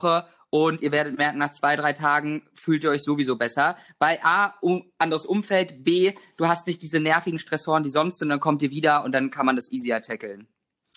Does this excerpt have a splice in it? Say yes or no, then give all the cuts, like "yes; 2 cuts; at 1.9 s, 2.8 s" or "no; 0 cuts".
no; 0 cuts